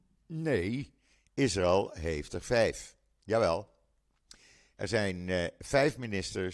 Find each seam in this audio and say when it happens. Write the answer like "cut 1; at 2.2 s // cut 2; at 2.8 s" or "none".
none